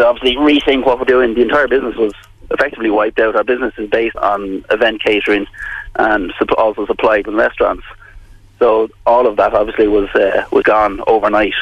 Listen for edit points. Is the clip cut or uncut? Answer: cut